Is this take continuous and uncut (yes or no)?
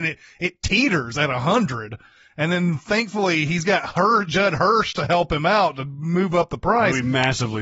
yes